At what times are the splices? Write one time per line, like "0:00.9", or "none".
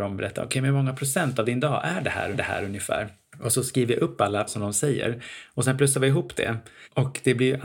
0:02.3
0:04.5